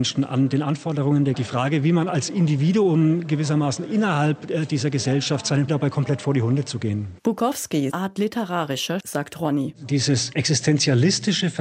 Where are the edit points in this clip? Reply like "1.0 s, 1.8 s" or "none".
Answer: 1.3 s, 5.7 s, 7.9 s, 9.0 s